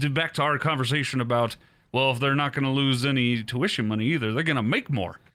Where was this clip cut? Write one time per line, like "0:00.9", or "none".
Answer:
none